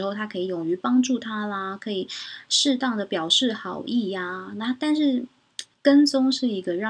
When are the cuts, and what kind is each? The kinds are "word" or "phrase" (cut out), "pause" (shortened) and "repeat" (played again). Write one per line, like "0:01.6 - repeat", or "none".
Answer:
0:05.7 - pause